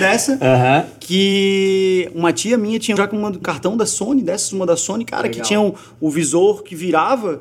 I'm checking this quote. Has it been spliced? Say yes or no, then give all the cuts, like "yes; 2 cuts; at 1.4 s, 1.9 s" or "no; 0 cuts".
yes; 2 cuts; at 3.0 s, 3.4 s